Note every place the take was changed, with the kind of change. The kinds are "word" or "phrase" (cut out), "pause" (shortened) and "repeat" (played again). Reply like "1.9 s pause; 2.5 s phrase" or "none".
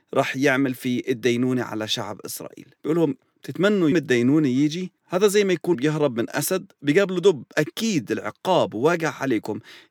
2.8 s pause; 3.9 s word; 5.0 s pause; 5.7 s word; 7.5 s word